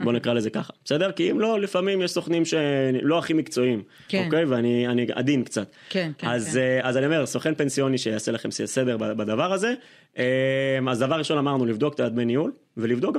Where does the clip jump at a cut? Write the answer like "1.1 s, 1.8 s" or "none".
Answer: none